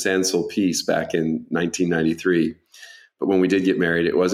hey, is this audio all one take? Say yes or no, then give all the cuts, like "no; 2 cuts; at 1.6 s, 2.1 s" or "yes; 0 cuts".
yes; 0 cuts